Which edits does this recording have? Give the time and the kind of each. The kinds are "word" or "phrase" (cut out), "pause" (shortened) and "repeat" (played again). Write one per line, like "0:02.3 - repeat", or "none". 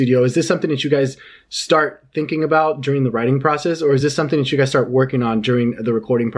none